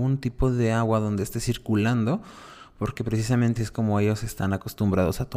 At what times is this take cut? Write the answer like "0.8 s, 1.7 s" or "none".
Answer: 3.6 s